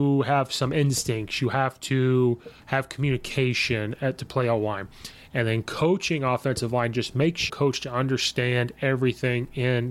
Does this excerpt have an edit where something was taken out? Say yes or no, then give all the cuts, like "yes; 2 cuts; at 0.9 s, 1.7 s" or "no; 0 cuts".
yes; 2 cuts; at 2.6 s, 7.5 s